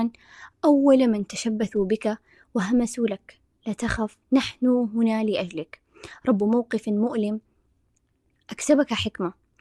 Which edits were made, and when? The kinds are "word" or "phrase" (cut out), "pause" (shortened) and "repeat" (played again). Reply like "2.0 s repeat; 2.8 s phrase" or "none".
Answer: 4.2 s pause